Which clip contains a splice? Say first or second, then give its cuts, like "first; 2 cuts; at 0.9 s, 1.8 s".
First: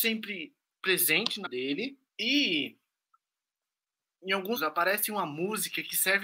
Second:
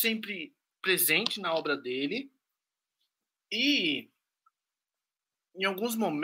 first; 3 cuts; at 1.5 s, 2.1 s, 4.6 s